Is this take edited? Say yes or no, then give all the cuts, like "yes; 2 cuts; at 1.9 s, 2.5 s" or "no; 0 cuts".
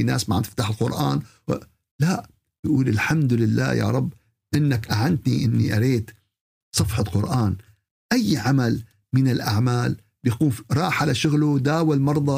no; 0 cuts